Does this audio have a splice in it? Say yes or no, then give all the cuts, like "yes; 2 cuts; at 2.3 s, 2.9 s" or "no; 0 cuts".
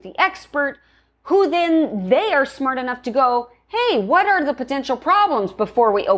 no; 0 cuts